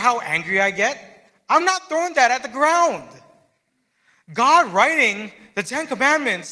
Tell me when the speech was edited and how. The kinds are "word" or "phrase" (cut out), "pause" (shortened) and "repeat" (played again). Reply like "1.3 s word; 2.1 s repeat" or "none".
none